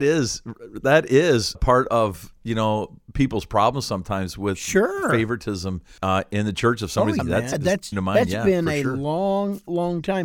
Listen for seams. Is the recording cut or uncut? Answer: cut